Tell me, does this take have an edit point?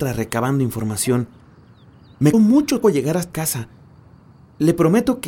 yes; 3 cuts; at 2.3 s, 2.8 s, 3.3 s

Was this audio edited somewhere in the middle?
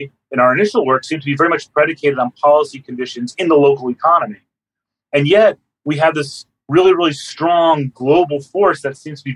no; 0 cuts

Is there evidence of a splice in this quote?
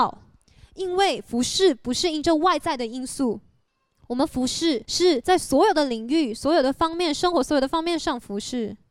no; 0 cuts

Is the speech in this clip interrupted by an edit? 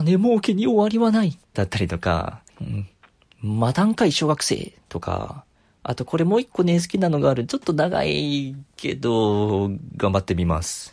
yes; 3 cuts; at 1.4 s, 2.5 s, 5.5 s

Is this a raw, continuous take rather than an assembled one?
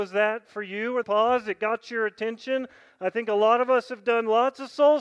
no; 1 cut; at 1.0 s

